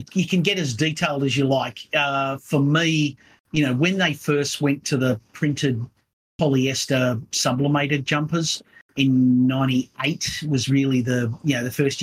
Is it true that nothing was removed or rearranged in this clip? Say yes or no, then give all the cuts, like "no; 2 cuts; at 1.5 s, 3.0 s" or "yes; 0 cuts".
yes; 0 cuts